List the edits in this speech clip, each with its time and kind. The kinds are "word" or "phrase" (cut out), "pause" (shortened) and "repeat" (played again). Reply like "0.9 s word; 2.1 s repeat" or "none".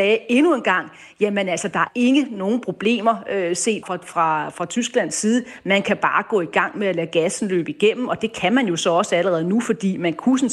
1.9 s word; 3.8 s word